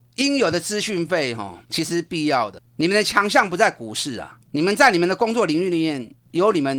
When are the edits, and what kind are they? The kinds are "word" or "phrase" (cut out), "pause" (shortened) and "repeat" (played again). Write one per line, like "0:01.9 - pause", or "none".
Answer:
0:01.6 - pause
0:02.7 - pause
0:04.4 - pause